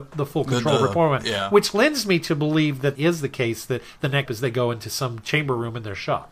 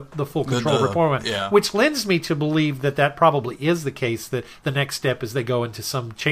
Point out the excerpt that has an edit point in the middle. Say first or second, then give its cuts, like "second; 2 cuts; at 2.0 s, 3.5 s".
first; 2 cuts; at 2.9 s, 4.3 s